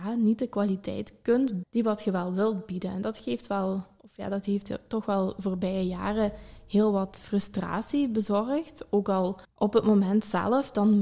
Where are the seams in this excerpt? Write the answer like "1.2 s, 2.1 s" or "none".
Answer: 1.6 s, 7.2 s, 9.4 s